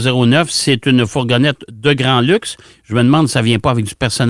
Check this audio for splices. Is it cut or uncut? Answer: uncut